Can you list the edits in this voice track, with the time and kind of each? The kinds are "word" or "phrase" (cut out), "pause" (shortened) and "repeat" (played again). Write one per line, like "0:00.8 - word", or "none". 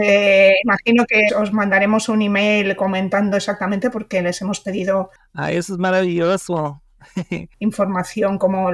0:01.3 - word